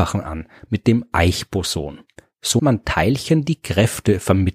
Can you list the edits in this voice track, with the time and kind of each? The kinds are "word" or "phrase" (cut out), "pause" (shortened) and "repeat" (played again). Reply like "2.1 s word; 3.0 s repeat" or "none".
2.6 s word